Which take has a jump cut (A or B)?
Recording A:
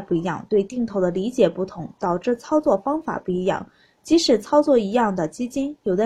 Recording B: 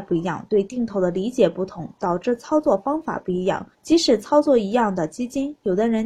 B